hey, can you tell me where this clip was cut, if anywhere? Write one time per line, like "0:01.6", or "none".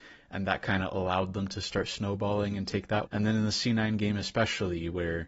0:03.1

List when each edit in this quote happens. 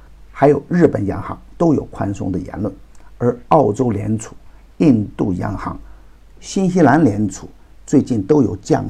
none

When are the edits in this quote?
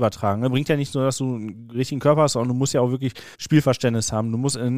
0:03.3

